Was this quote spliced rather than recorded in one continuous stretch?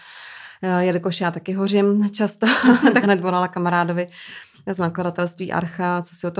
yes; 1 cut; at 3.0 s

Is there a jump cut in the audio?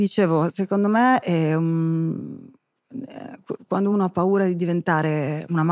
no; 0 cuts

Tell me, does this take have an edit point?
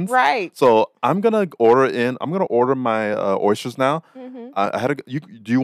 no; 0 cuts

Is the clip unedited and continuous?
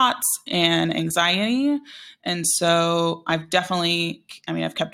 yes; 0 cuts

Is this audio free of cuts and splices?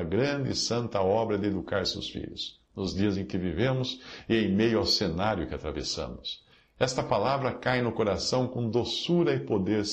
yes; 0 cuts

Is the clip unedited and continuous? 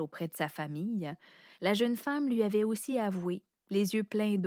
yes; 0 cuts

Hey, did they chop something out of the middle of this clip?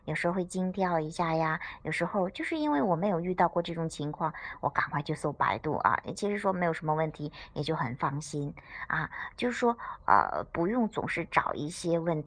no; 0 cuts

